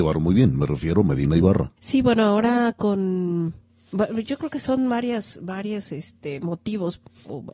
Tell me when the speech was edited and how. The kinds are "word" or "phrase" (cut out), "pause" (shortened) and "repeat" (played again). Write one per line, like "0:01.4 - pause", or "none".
0:01.8 - pause